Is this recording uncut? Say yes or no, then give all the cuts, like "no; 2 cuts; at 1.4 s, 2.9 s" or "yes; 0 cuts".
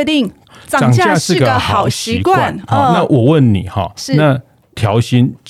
yes; 0 cuts